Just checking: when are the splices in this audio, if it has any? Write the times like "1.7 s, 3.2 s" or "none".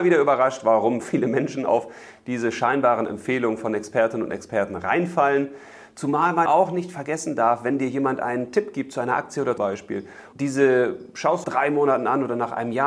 1.0 s, 6.5 s, 9.6 s, 10.3 s, 11.4 s